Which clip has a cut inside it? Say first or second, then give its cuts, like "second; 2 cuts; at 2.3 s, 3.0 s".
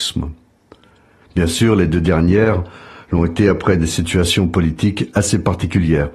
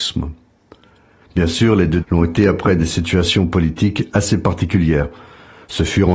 second; 1 cut; at 2.0 s